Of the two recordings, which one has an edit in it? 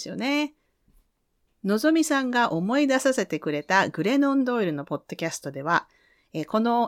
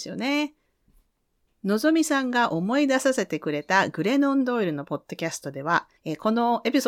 second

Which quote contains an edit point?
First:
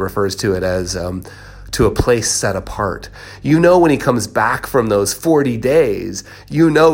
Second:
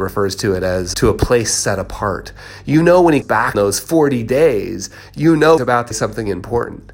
second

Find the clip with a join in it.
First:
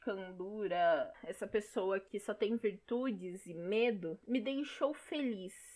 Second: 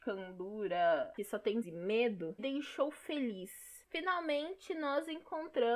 second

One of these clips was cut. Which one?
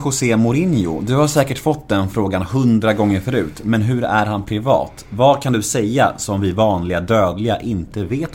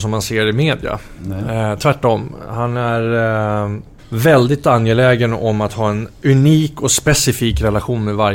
second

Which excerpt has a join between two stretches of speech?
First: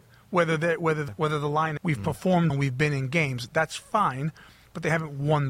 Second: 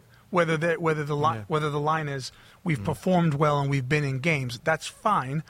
first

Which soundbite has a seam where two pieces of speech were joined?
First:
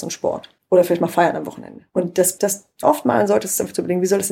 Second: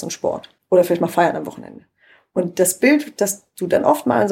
first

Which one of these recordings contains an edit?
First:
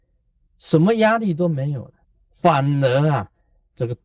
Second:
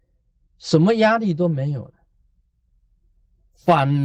first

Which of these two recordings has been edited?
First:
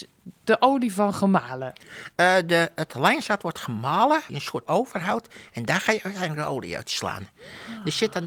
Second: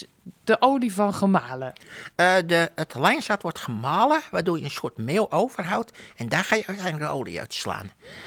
first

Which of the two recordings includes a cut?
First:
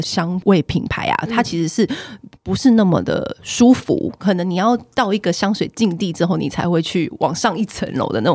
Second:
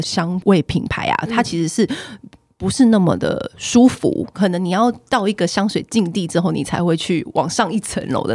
first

